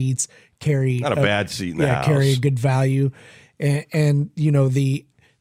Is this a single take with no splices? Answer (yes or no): yes